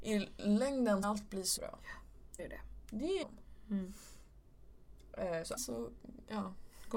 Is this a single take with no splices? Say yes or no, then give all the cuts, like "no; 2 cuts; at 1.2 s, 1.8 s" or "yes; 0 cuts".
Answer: no; 5 cuts; at 1.0 s, 1.6 s, 2.4 s, 3.2 s, 5.6 s